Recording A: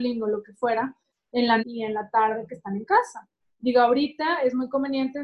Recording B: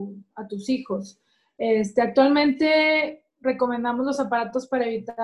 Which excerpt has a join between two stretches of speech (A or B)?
A